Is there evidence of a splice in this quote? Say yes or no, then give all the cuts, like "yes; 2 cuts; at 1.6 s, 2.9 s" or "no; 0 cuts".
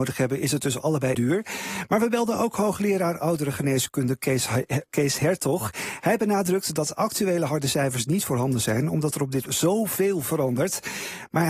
yes; 2 cuts; at 1.1 s, 9.5 s